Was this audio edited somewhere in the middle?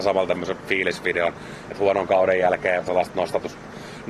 yes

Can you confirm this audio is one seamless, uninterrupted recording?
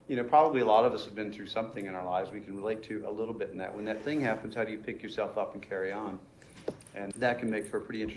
no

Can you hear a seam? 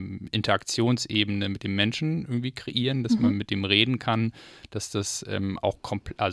no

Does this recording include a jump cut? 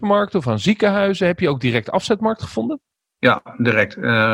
no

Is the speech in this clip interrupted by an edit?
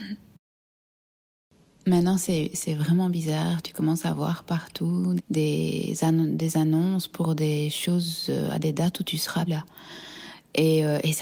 yes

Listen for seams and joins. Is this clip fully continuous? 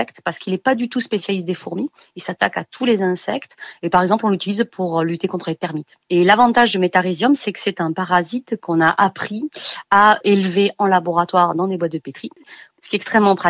yes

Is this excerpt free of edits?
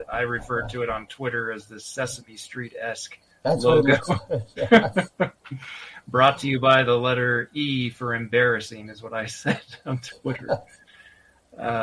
yes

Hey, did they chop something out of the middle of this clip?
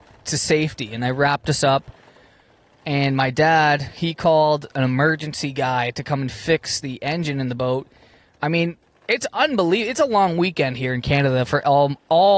yes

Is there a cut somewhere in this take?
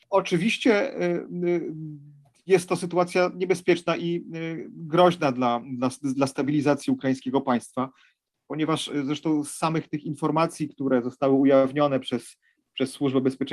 no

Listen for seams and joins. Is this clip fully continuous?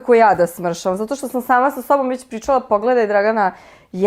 yes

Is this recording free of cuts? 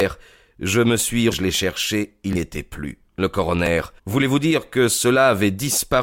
no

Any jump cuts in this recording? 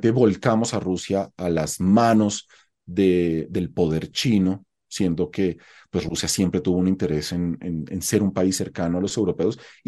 no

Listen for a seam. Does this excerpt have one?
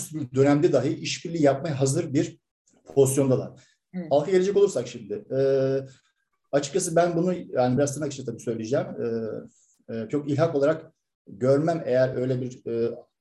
no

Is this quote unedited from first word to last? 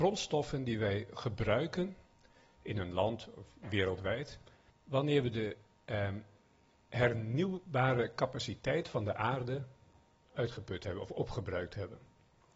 no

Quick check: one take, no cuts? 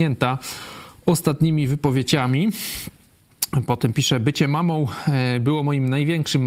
yes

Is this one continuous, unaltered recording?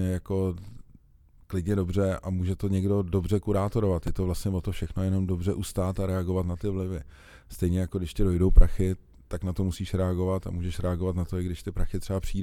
no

